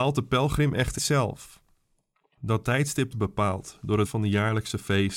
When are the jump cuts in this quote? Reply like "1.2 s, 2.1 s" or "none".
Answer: 1.0 s, 3.1 s, 4.0 s

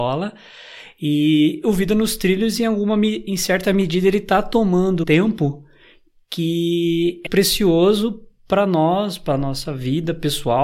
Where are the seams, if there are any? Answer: 5.0 s, 7.3 s

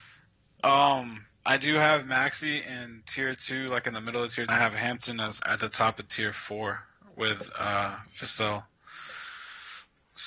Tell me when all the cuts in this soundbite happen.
1.3 s, 4.5 s, 5.4 s

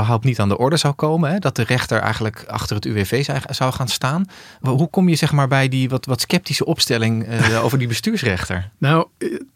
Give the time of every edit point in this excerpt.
none

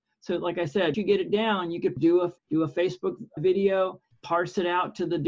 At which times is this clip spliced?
0.9 s, 2.0 s, 2.4 s, 3.4 s, 4.1 s

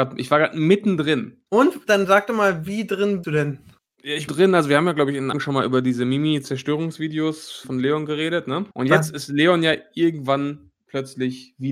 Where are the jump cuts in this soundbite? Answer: 1.5 s, 3.2 s, 4.3 s, 5.3 s, 7.6 s, 8.7 s

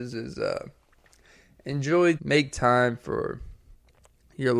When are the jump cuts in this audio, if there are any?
2.2 s

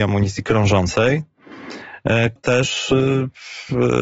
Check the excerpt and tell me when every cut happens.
2.4 s

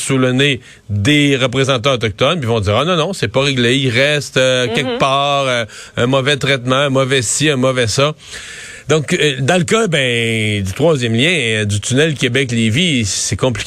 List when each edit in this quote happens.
none

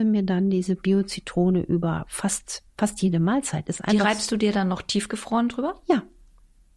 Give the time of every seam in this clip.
2.7 s

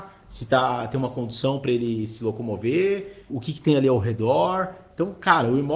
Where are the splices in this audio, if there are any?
3.3 s

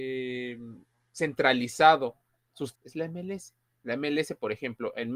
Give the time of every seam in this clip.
2.7 s

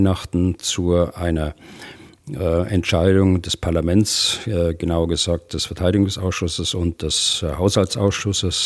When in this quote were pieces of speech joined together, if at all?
none

